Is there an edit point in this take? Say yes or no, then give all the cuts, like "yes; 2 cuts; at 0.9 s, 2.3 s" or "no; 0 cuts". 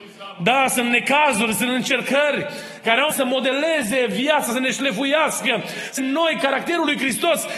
yes; 3 cuts; at 3.1 s, 4.5 s, 6.0 s